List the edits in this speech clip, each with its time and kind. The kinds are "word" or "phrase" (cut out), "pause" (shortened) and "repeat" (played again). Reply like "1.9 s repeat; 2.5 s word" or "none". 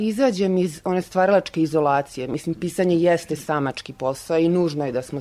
none